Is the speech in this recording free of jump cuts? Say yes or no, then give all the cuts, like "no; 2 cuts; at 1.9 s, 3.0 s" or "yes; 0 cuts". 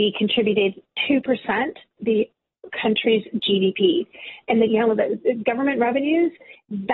no; 2 cuts; at 2.0 s, 4.7 s